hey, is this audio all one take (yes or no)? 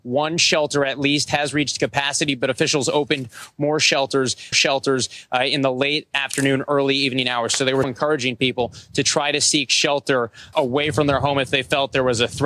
no